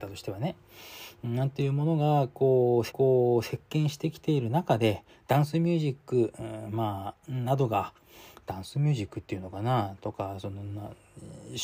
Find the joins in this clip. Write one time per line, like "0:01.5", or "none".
0:02.9
0:07.2